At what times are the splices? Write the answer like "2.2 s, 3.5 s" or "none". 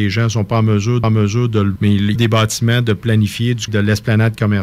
1.0 s, 1.8 s, 2.2 s, 3.7 s